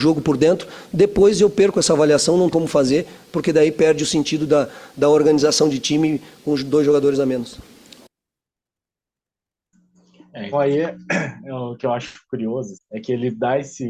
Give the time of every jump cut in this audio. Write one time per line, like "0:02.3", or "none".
0:02.5
0:10.5
0:12.7